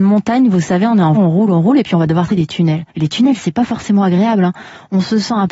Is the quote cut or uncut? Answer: cut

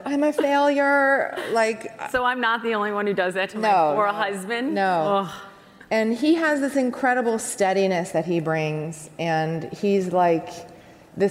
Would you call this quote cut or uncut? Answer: uncut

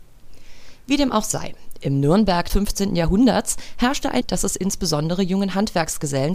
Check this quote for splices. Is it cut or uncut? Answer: cut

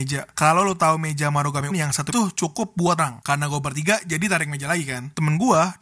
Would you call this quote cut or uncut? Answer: cut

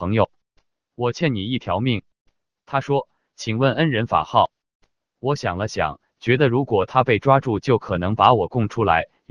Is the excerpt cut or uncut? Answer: uncut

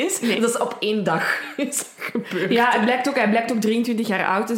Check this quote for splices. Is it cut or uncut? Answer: uncut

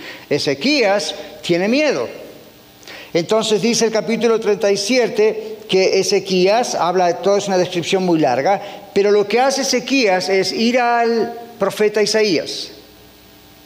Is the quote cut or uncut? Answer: uncut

